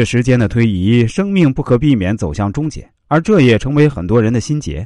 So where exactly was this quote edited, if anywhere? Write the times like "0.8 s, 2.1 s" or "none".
3.0 s